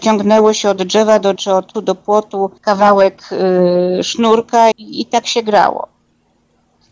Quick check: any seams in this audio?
yes; 4 cuts; at 1.4 s, 1.7 s, 2.6 s, 4.7 s

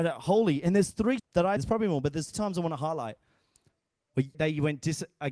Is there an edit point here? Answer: yes; 4 cuts; at 1.2 s, 1.6 s, 2.3 s, 4.3 s

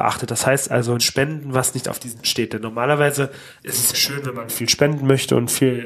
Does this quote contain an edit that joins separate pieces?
yes; 4 cuts; at 1.0 s, 2.2 s, 3.6 s, 3.9 s

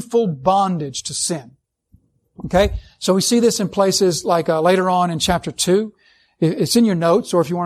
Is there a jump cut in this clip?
no; 0 cuts

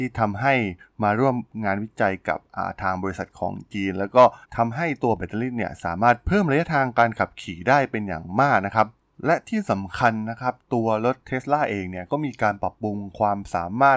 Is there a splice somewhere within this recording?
yes; 1 cut; at 4.4 s

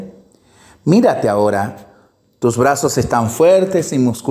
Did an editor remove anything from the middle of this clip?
no; 0 cuts

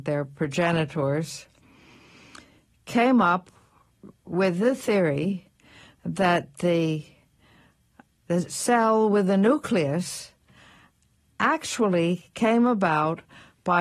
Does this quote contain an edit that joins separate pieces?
no; 0 cuts

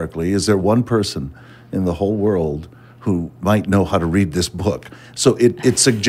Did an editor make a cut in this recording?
no; 0 cuts

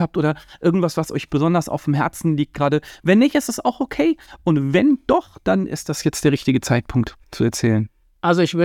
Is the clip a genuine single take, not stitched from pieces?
yes; 0 cuts

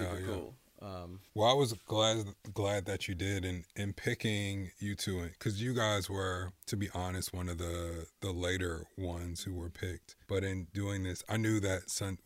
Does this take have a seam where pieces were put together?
yes; 3 cuts; at 1.3 s, 6.6 s, 10.2 s

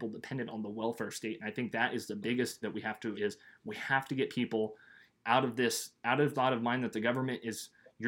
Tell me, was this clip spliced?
yes; 3 cuts; at 2.6 s, 3.1 s, 6.3 s

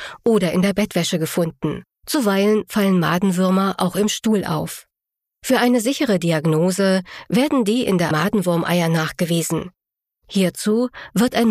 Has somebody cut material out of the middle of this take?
yes; 3 cuts; at 1.9 s, 5.1 s, 8.1 s

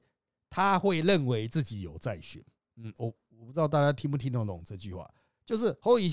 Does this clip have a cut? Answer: yes; 1 cut; at 2.6 s

